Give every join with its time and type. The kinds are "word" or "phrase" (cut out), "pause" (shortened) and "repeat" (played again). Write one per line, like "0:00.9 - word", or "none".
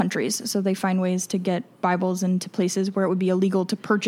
none

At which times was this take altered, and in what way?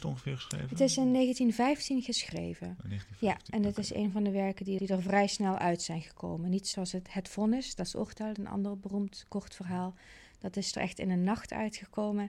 0:04.8 - word
0:06.7 - word

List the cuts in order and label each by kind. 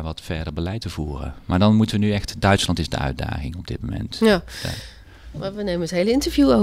none

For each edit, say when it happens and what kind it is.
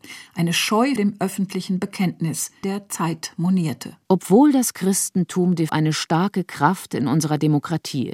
0:01.0 - word
0:02.6 - phrase
0:04.0 - pause
0:05.7 - word

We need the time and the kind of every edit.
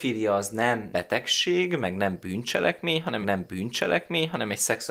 0:00.9 - word
0:03.2 - repeat

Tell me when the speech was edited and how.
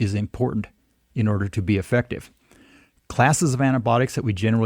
none

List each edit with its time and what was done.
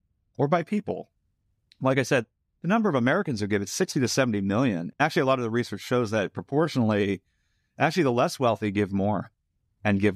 0:04.9 - pause

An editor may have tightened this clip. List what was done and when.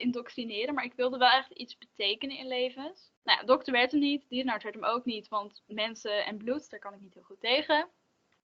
0:03.2 - pause

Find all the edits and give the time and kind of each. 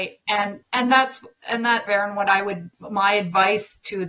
0:01.9 - phrase

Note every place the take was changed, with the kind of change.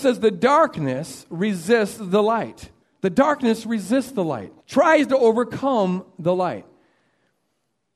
0:02.8 - pause
0:04.6 - pause

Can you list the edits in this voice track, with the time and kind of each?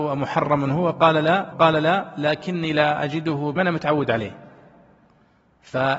0:01.5 - repeat
0:03.6 - phrase

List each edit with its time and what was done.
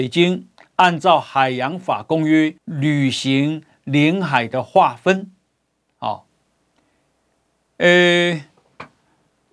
0:02.6 - pause

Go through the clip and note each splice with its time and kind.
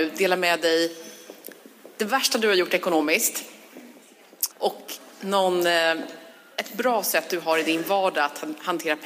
0:04.5 - pause

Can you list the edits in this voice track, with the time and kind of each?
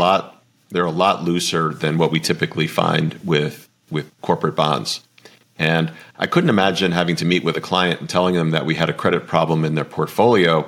none

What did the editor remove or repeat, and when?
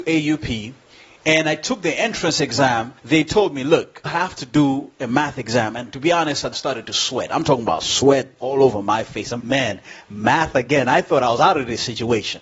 0:03.0 - pause
0:04.1 - word
0:06.5 - phrase
0:09.4 - word

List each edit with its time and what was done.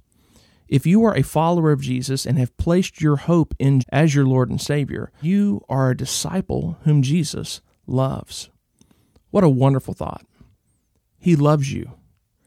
0:03.8 - word
0:05.2 - word
0:05.7 - word

